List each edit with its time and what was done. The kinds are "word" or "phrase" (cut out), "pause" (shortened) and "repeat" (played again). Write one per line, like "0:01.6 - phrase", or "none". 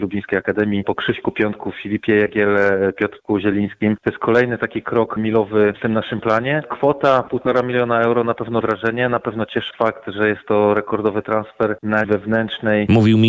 0:08.6 - word
0:09.7 - word
0:12.0 - word